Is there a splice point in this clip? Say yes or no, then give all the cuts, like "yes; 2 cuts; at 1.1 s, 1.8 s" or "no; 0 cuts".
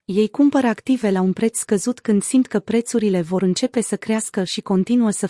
no; 0 cuts